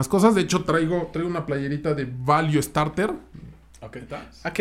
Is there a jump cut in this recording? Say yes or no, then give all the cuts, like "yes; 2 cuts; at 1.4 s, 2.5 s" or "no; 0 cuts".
no; 0 cuts